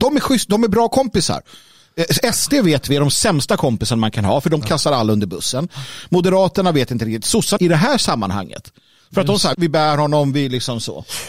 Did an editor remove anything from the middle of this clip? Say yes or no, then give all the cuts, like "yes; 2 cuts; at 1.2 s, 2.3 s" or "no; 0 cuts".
yes; 2 cuts; at 7.6 s, 9.5 s